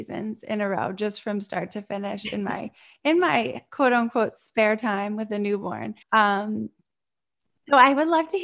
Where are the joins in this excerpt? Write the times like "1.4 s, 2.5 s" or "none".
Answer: 6.0 s